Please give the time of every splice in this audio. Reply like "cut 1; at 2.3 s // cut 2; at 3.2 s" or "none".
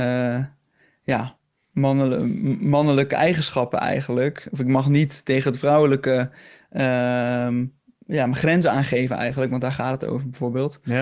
none